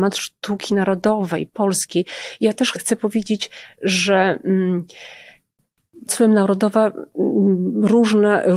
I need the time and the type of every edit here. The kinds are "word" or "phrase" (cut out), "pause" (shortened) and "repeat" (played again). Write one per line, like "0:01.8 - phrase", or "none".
0:02.7 - word
0:06.1 - word